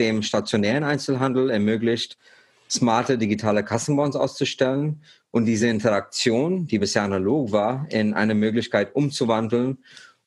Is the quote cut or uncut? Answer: uncut